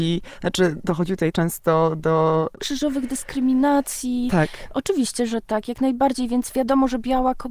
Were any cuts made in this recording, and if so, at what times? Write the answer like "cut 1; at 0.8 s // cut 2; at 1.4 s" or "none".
cut 1; at 1.3 s